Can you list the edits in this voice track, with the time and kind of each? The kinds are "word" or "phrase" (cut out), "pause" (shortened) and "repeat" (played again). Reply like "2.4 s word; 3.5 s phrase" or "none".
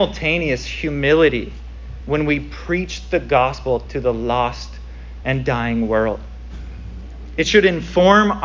none